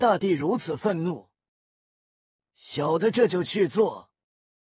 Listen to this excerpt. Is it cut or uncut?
uncut